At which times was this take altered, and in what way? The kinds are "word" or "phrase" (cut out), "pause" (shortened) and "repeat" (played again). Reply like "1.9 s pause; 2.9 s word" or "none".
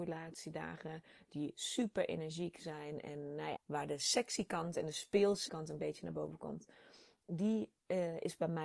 3.6 s word; 5.5 s word

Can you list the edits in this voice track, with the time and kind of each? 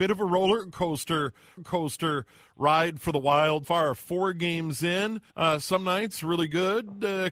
1.6 s repeat; 3.6 s word; 5.3 s pause

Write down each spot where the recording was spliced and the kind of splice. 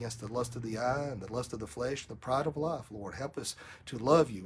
none

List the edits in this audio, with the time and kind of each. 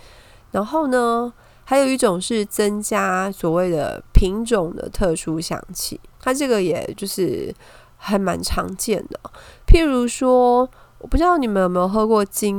6.1 s pause

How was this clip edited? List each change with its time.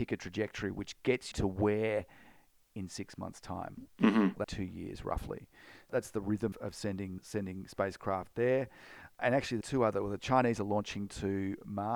1.3 s word; 2.7 s phrase; 4.4 s phrase; 6.5 s word; 7.2 s word; 9.6 s phrase

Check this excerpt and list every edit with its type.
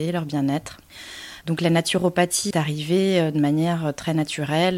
2.5 s word

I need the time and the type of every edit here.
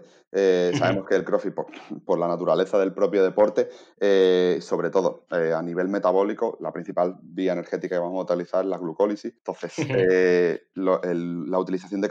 9.4 s pause

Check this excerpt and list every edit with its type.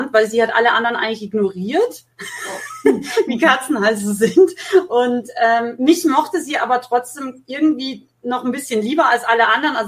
none

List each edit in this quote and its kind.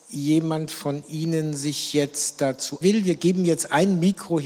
2.8 s phrase

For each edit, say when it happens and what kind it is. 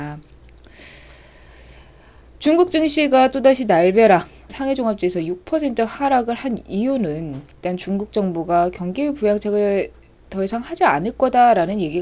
4.5 s word; 7.5 s pause

